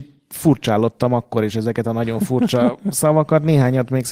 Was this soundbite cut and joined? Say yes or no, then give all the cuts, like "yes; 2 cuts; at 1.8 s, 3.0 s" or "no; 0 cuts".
no; 0 cuts